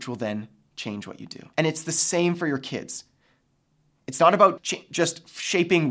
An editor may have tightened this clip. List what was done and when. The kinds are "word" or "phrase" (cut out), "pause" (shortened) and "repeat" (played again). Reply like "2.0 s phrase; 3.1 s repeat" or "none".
1.5 s pause; 4.6 s word